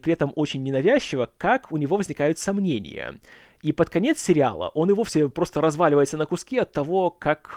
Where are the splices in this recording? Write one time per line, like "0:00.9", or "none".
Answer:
none

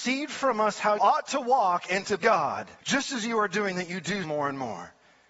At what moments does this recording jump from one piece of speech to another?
0:01.0
0:02.2
0:02.8
0:04.2

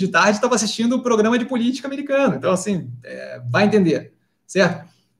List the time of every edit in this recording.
none

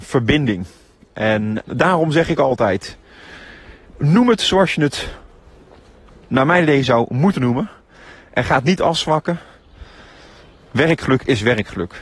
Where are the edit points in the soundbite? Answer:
0:01.6
0:03.9

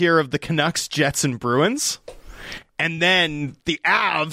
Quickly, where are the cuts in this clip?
none

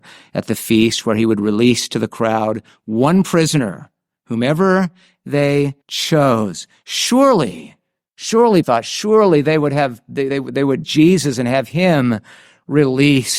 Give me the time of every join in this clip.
0:05.8
0:08.6
0:10.3
0:10.8

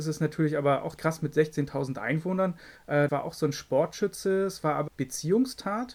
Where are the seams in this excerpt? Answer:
0:01.0
0:03.1
0:04.9

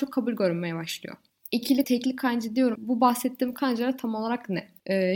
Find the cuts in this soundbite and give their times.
0:01.8
0:02.8

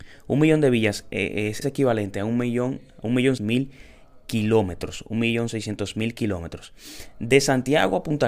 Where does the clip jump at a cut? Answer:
0:01.6
0:03.4

